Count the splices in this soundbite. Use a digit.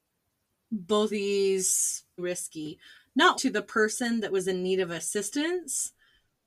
3